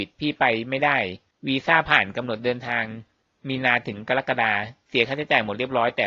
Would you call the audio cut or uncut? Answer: uncut